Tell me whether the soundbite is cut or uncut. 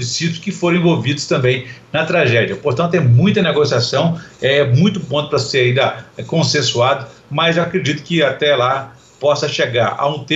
uncut